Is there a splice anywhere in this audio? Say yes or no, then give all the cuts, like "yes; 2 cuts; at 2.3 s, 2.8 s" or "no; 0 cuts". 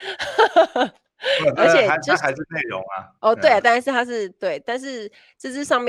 yes; 1 cut; at 3.2 s